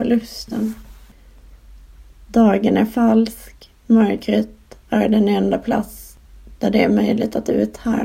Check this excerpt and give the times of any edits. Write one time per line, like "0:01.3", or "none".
none